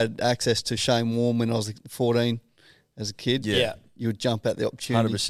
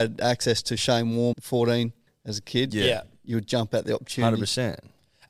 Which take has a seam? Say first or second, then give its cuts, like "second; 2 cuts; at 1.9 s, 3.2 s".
second; 2 cuts; at 1.3 s, 2.1 s